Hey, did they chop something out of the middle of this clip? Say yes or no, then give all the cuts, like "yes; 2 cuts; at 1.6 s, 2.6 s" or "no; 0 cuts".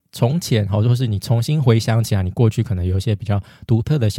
no; 0 cuts